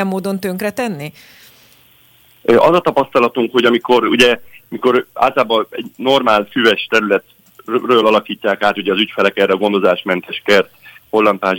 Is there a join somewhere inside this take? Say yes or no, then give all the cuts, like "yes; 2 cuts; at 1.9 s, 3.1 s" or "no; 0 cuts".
no; 0 cuts